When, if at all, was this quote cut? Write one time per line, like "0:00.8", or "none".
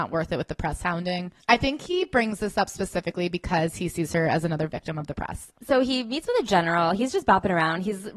0:01.4
0:05.6